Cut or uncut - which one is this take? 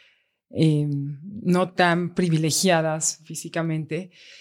uncut